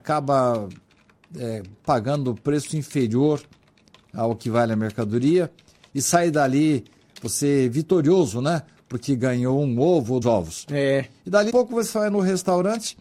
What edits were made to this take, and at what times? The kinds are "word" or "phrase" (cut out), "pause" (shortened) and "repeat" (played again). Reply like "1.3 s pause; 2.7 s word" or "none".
10.2 s word; 11.5 s word